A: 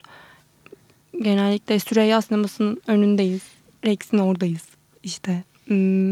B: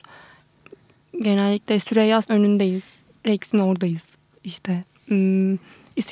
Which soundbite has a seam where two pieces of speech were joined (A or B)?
B